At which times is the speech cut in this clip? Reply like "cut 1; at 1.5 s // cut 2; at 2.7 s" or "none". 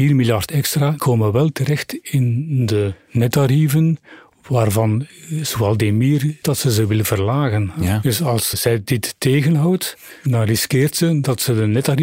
cut 1; at 1.0 s // cut 2; at 6.4 s // cut 3; at 8.5 s